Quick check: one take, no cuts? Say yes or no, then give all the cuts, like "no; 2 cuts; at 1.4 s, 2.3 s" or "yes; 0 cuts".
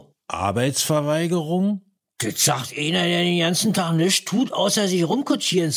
yes; 0 cuts